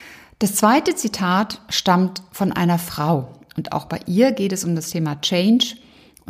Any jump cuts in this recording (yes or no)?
no